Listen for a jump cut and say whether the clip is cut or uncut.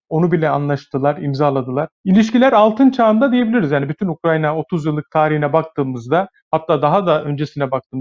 cut